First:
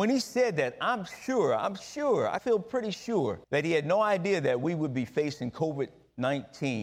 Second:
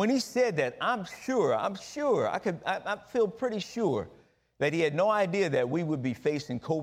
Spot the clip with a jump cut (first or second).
first